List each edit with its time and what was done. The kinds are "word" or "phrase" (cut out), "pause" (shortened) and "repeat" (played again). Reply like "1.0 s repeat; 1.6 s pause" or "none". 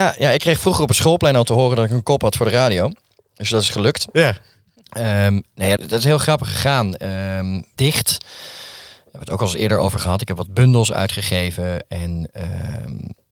4.1 s pause; 5.8 s phrase; 7.8 s word

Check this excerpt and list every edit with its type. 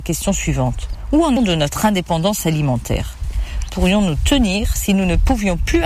1.4 s word; 3.7 s phrase

